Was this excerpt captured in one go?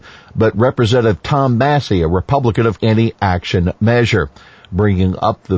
no; 1 cut; at 2.8 s

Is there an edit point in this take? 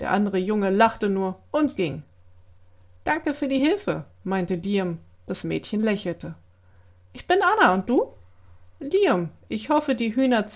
no; 0 cuts

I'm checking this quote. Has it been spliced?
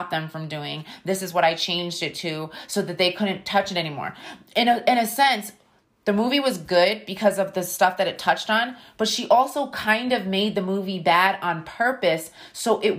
no; 0 cuts

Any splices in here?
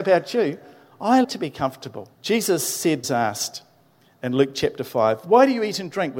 yes; 3 cuts; at 1.2 s, 2.1 s, 3.0 s

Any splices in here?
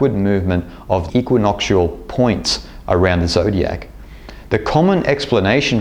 yes; 1 cut; at 1.1 s

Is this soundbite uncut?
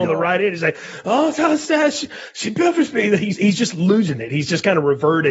no; 1 cut; at 3.3 s

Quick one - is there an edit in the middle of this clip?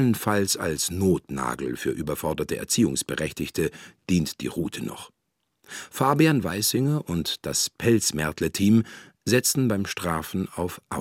no; 0 cuts

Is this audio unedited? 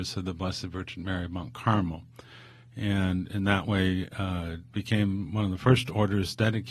yes; 0 cuts

